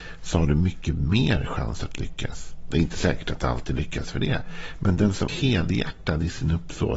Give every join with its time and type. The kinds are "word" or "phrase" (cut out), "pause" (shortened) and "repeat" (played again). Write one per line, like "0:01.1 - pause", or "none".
0:05.3 - word